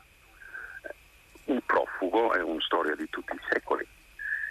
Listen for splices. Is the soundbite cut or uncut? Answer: uncut